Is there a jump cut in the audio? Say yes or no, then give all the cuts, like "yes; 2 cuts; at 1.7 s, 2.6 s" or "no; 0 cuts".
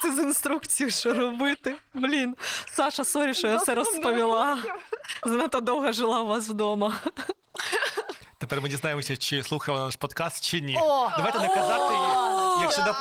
no; 0 cuts